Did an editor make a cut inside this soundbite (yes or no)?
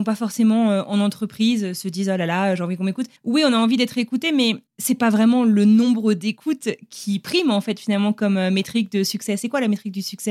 yes